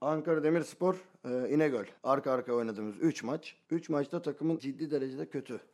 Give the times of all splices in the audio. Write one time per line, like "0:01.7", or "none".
0:02.0
0:04.6